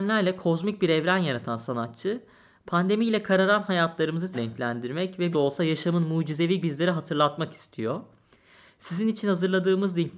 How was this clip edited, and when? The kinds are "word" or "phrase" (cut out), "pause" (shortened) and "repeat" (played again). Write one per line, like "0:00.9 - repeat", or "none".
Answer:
0:04.3 - word
0:05.3 - word
0:06.6 - word